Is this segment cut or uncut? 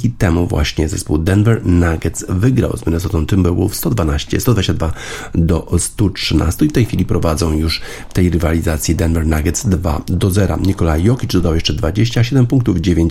uncut